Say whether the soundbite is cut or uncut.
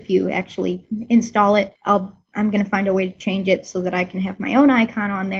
cut